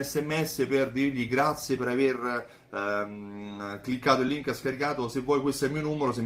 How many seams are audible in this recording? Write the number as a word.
zero